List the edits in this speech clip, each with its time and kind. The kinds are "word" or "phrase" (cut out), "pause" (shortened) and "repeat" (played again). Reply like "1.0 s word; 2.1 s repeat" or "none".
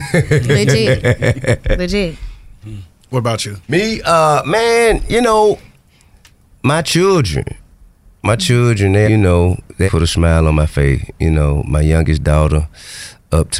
3.6 s pause; 9.1 s word; 9.9 s word

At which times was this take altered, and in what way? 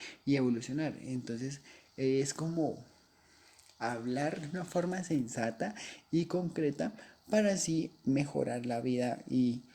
none

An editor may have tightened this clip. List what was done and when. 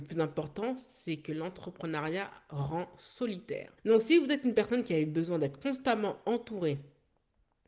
3.8 s pause

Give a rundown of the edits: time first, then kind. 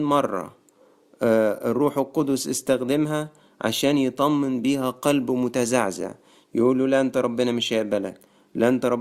none

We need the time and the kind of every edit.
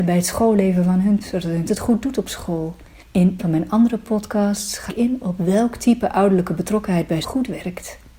1.2 s word; 1.7 s word; 3.4 s word; 4.9 s word; 7.2 s word

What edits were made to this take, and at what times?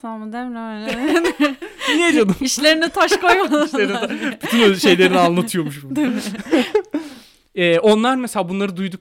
none

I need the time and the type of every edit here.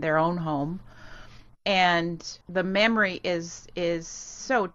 2.4 s pause

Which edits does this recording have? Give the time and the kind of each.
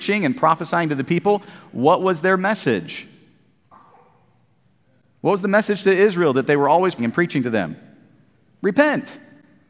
7.0 s word

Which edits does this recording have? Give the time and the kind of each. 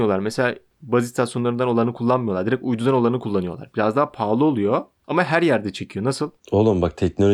6.4 s pause

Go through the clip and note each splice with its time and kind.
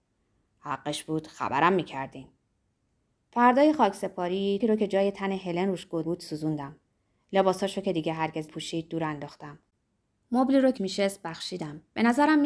4.6 s word; 6.0 s word; 8.5 s word; 10.8 s word

